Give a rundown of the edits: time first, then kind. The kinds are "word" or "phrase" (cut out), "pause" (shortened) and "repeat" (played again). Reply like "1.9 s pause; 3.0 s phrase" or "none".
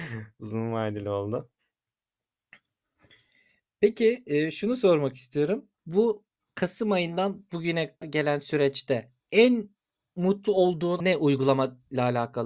5.8 s pause; 8.0 s word; 9.2 s pause; 11.0 s word